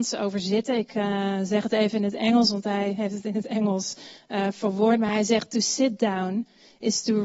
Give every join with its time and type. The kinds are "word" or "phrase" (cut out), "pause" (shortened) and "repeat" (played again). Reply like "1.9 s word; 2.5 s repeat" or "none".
none